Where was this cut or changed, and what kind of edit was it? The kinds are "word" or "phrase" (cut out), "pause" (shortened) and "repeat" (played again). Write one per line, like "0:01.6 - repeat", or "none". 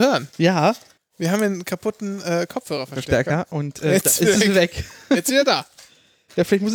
0:01.0 - pause